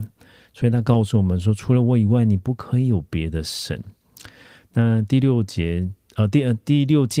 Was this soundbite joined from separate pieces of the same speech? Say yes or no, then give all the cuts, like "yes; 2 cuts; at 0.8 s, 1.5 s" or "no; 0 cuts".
no; 0 cuts